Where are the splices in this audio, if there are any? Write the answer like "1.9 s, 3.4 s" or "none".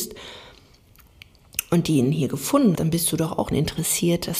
2.8 s, 3.5 s